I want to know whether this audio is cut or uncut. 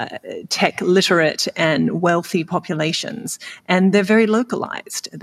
uncut